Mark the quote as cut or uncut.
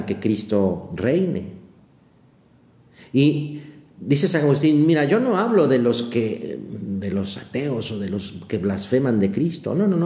uncut